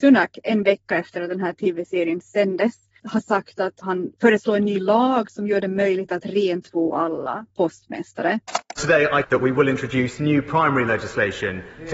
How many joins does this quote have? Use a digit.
4